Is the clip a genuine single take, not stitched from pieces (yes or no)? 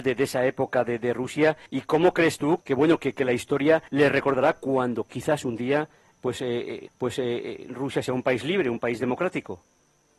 no